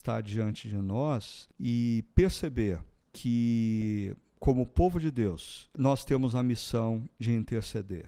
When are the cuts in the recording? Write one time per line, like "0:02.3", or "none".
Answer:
none